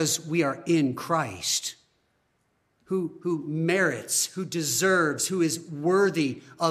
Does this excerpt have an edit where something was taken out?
no; 0 cuts

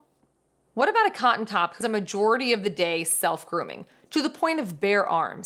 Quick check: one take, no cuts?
no; 1 cut; at 1.8 s

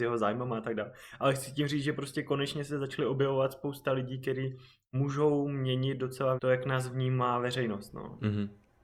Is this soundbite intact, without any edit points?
no; 1 cut; at 6.4 s

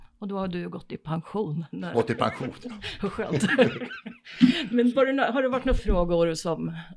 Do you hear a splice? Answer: yes; 3 cuts; at 1.9 s, 4.9 s, 5.8 s

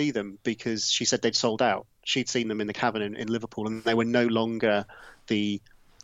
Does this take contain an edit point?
no; 0 cuts

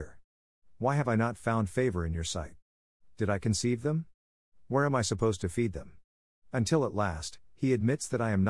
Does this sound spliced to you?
no; 0 cuts

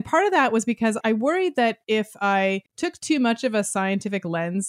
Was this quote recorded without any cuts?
no; 2 cuts; at 1.0 s, 2.7 s

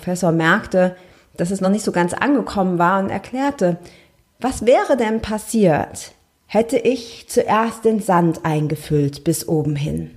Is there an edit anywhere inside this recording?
no; 0 cuts

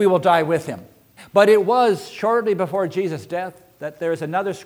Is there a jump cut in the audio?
yes; 1 cut; at 1.2 s

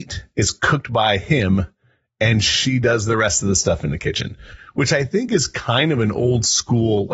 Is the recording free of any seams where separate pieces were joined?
yes; 0 cuts

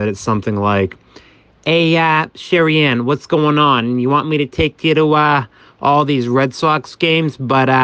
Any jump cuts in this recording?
no; 0 cuts

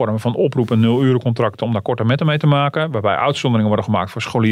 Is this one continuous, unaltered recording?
yes; 0 cuts

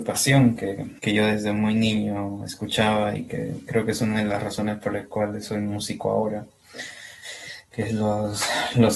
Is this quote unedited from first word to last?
no; 1 cut; at 1.0 s

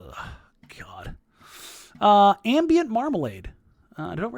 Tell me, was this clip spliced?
no; 0 cuts

